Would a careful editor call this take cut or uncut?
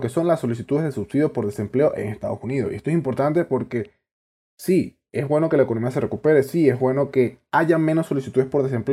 uncut